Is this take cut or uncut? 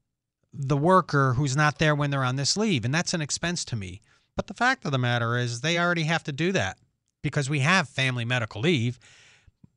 uncut